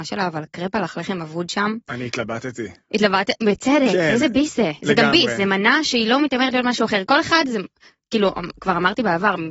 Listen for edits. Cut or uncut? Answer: uncut